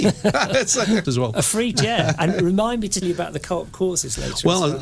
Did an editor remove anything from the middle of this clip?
yes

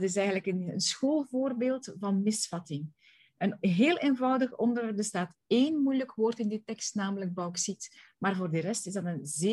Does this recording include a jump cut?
no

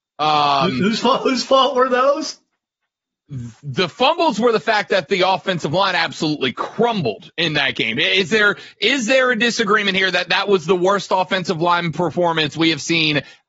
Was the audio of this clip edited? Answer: yes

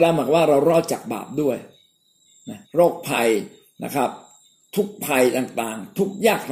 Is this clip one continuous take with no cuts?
no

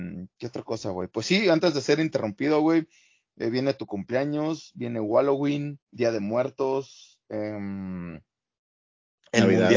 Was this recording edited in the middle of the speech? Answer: yes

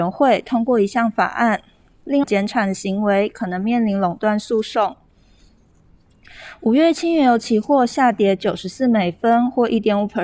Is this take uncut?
no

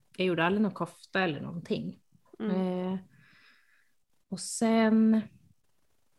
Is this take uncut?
yes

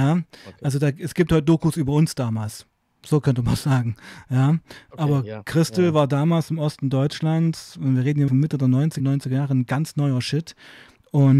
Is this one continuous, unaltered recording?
no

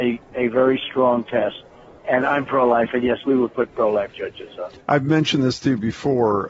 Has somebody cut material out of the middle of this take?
no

